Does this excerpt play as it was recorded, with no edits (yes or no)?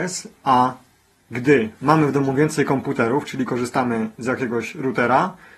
yes